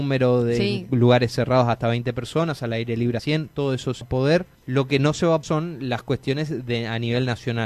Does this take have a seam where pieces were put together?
yes; 4 cuts; at 3.2 s, 4.0 s, 4.5 s, 5.4 s

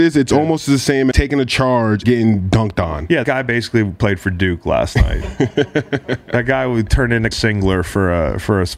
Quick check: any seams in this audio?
yes; 4 cuts; at 1.1 s, 2.0 s, 3.2 s, 7.3 s

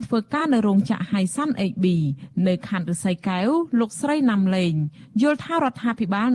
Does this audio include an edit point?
no; 0 cuts

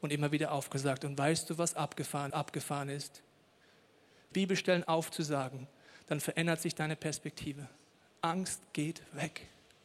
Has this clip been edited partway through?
yes; 3 cuts; at 2.3 s, 4.3 s, 4.8 s

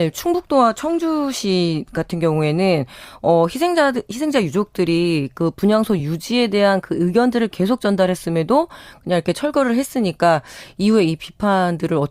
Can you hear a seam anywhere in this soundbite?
no; 0 cuts

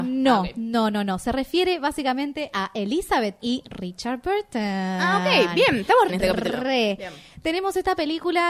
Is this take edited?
yes; 2 cuts; at 3.4 s, 6.1 s

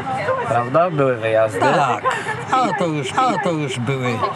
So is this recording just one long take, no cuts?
no; 1 cut; at 3.1 s

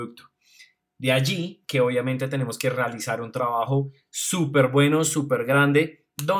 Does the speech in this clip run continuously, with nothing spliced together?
yes; 0 cuts

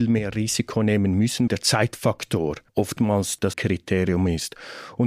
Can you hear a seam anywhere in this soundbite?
yes; 3 cuts; at 1.5 s, 2.7 s, 3.5 s

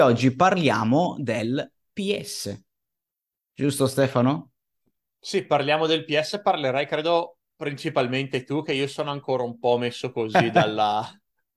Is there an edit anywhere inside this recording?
no; 0 cuts

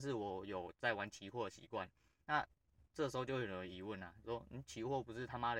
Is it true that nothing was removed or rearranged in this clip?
yes; 0 cuts

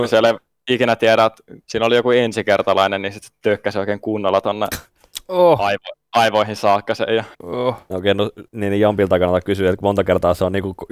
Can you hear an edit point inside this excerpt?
yes; 3 cuts; at 1.6 s, 7.3 s, 8.5 s

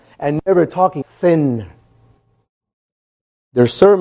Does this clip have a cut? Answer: yes; 1 cut; at 1.0 s

